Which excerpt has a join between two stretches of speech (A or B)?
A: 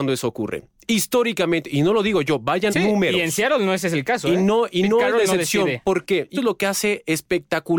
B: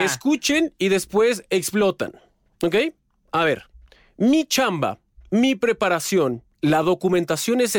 A